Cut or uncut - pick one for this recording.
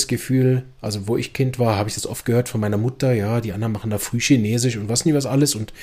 uncut